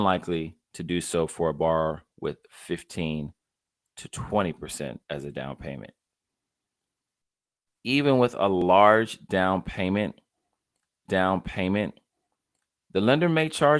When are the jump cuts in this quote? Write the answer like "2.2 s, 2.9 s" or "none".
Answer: 5.0 s, 11.1 s